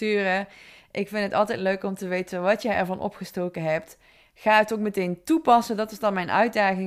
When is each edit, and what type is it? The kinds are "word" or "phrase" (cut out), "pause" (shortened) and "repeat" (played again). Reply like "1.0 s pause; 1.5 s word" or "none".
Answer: none